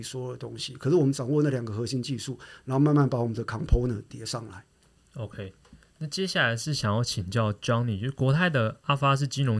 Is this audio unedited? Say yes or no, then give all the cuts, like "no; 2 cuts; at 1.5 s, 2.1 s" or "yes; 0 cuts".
yes; 0 cuts